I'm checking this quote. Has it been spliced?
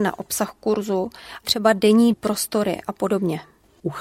yes; 2 cuts; at 1.4 s, 2.1 s

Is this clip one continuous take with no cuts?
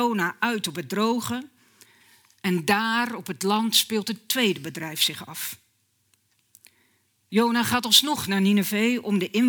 yes; 0 cuts

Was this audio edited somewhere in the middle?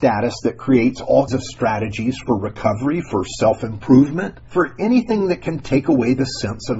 yes; 2 cuts; at 1.3 s, 4.5 s

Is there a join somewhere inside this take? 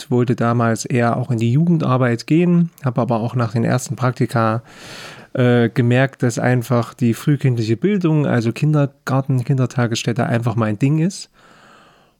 no; 0 cuts

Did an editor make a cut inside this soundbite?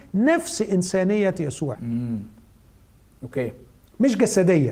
yes; 1 cut; at 1.7 s

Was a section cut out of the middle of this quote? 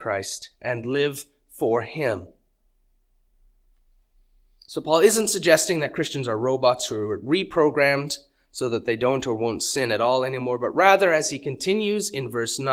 no; 0 cuts

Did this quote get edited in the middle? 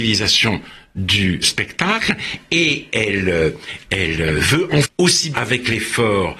yes; 4 cuts; at 1.4 s, 3.8 s, 4.8 s, 5.3 s

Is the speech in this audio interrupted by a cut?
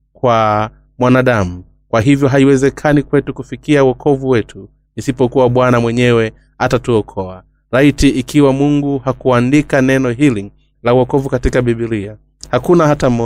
no; 0 cuts

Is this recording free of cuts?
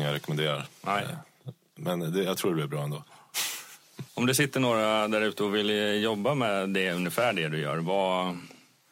no; 1 cut; at 4.1 s

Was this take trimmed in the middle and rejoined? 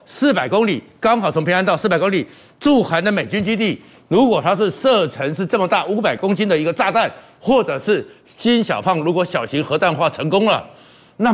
no; 0 cuts

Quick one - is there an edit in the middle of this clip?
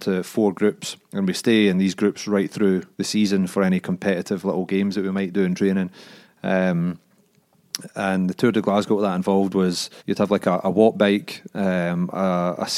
yes; 3 cuts; at 1.0 s, 2.9 s, 10.0 s

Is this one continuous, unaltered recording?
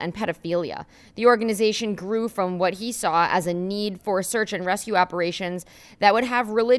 yes; 0 cuts

